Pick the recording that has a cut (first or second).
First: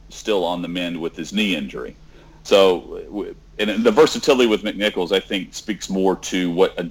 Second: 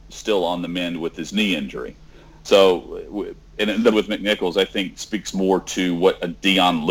second